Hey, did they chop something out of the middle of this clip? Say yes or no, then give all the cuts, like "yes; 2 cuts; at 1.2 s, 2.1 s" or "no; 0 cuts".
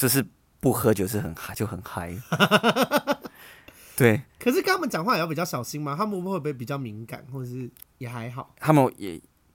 yes; 2 cuts; at 4.3 s, 7.8 s